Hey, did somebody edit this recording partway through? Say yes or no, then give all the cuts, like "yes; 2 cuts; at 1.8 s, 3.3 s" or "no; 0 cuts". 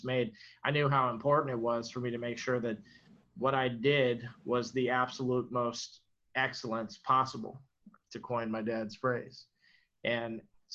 no; 0 cuts